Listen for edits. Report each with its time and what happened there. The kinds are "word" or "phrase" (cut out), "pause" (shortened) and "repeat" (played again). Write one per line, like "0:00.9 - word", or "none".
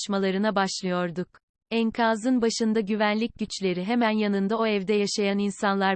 none